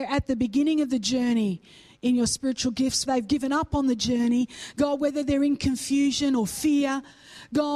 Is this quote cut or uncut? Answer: cut